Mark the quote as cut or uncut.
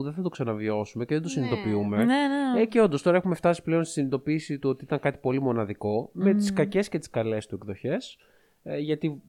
uncut